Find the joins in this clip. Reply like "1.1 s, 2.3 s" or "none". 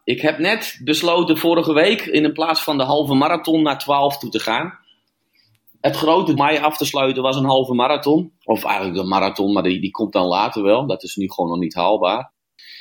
6.4 s, 8.4 s